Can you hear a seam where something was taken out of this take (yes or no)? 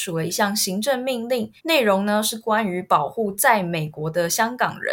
yes